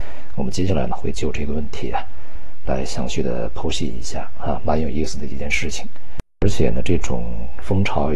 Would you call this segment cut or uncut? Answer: cut